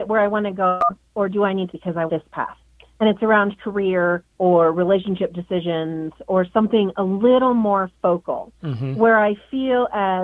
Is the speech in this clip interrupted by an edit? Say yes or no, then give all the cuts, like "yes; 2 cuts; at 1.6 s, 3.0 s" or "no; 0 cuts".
yes; 4 cuts; at 1.7 s, 2.1 s, 4.3 s, 8.5 s